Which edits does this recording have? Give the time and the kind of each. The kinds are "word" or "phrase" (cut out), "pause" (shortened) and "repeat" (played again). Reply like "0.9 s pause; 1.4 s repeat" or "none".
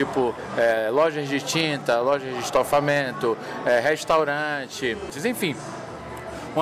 none